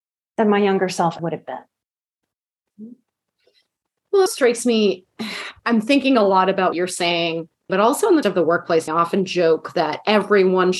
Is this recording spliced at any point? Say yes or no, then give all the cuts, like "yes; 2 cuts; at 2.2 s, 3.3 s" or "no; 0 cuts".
yes; 7 cuts; at 1.2 s, 4.3 s, 5.6 s, 6.7 s, 7.7 s, 8.2 s, 8.9 s